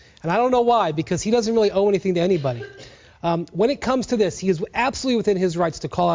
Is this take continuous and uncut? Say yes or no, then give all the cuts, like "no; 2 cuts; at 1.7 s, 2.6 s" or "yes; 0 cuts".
yes; 0 cuts